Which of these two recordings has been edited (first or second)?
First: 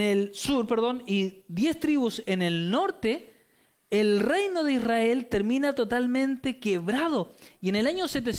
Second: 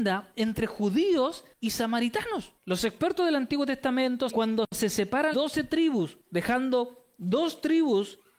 second